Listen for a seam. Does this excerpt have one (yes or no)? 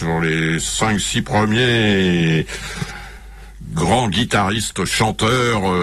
no